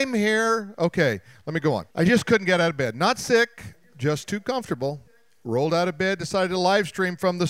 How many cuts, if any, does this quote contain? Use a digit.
1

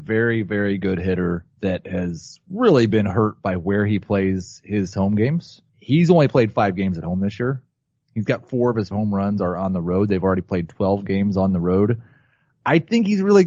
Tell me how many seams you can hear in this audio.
2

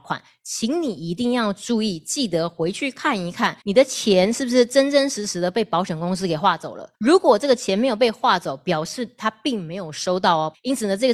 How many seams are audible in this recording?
2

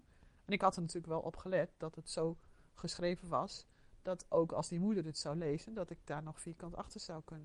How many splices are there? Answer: 0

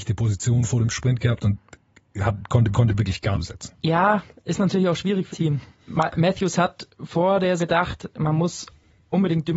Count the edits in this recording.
5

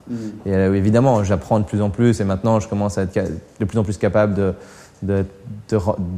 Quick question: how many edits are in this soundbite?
0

